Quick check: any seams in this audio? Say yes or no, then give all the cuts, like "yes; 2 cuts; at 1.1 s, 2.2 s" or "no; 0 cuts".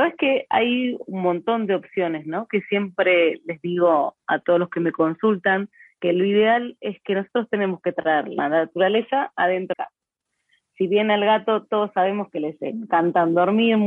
yes; 1 cut; at 9.7 s